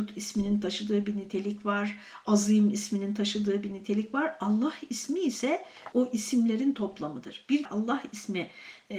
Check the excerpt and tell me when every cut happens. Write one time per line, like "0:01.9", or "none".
0:05.9
0:07.6